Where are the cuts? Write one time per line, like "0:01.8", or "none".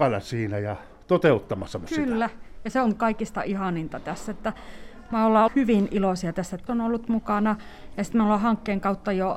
0:05.5
0:06.7